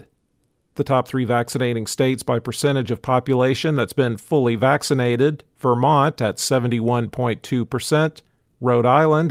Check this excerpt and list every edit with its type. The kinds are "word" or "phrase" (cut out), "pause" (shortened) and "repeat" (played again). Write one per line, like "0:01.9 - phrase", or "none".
none

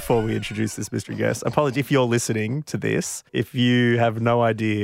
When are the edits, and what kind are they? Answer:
0:03.3 - pause

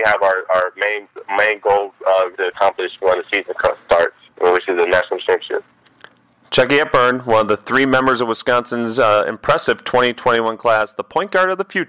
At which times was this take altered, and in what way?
0:02.3 - word

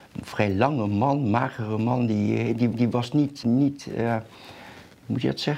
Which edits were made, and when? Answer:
0:02.7 - repeat
0:03.4 - word

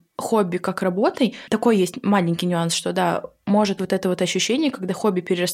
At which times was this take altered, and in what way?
0:03.8 - word

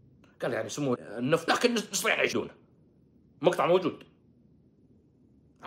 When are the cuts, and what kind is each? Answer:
0:01.0 - word
0:01.5 - phrase
0:02.3 - word

